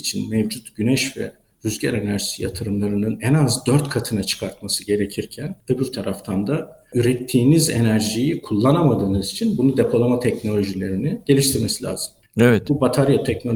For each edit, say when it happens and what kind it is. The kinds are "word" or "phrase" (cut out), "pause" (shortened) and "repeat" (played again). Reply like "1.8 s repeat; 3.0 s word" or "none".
5.6 s pause